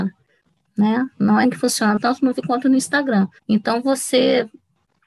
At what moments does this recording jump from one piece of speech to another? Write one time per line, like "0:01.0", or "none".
0:01.4
0:02.3
0:03.4